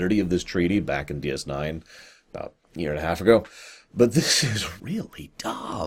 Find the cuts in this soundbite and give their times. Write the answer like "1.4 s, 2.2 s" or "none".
2.6 s, 4.8 s